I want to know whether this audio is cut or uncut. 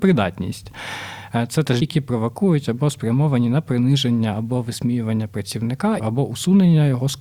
cut